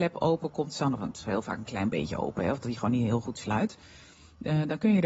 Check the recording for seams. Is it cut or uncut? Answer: uncut